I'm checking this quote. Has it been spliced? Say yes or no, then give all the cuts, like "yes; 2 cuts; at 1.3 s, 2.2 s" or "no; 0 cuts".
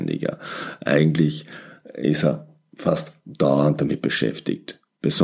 no; 0 cuts